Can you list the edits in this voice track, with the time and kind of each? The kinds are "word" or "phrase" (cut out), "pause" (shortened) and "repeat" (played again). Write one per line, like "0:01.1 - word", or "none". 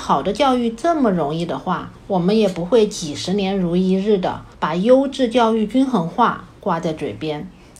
0:02.0 - pause
0:04.5 - pause